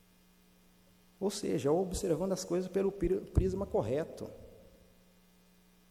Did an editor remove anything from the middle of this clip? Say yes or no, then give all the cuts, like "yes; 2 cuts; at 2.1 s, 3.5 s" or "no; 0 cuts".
no; 0 cuts